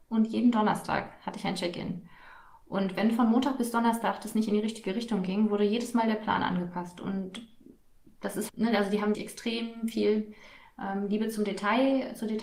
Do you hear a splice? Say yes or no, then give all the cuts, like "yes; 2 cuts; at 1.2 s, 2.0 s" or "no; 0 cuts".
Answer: yes; 2 cuts; at 8.5 s, 9.1 s